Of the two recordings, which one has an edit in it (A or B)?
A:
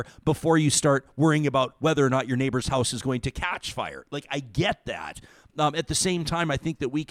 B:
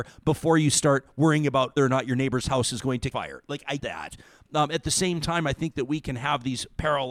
B